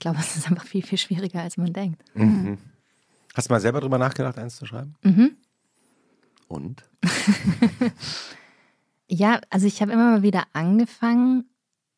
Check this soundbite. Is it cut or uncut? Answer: uncut